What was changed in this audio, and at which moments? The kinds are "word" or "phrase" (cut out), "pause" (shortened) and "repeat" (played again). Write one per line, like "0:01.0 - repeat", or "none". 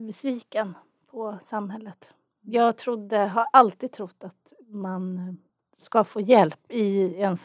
none